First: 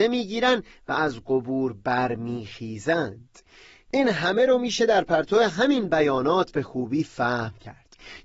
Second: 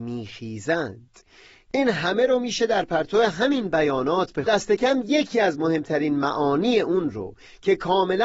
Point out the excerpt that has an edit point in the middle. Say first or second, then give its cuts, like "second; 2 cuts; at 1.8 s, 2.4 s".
second; 1 cut; at 4.5 s